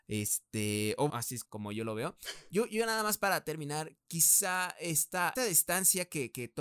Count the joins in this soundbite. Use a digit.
3